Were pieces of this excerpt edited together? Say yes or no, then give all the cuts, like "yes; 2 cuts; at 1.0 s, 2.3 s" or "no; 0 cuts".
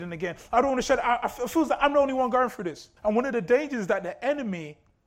yes; 1 cut; at 3.0 s